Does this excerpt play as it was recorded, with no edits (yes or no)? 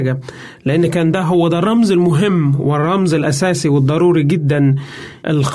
yes